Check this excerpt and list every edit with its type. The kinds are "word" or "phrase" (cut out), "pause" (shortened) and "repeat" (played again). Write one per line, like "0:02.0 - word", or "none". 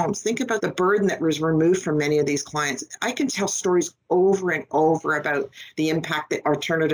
none